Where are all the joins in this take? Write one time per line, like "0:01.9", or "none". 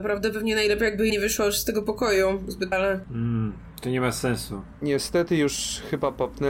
0:01.1
0:02.7